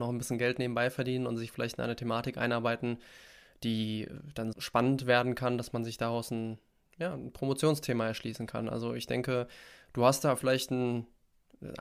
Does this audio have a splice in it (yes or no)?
yes